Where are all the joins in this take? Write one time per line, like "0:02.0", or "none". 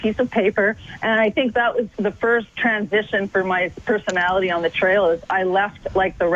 0:01.9